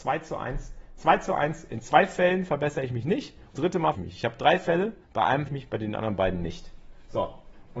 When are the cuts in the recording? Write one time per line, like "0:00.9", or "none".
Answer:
0:03.6
0:03.9
0:05.0
0:05.5

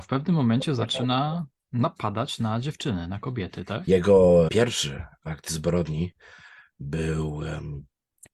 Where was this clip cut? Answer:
0:04.5

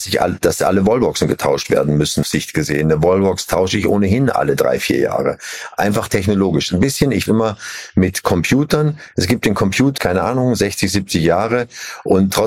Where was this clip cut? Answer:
0:02.2
0:07.3
0:10.0

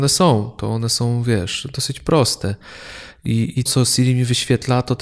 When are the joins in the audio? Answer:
0:03.7

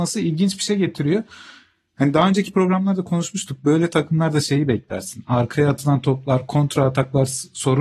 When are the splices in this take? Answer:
none

